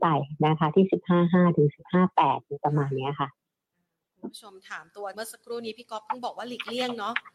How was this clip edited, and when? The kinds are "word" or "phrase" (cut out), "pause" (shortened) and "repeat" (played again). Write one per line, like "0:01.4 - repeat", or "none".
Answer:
0:05.1 - word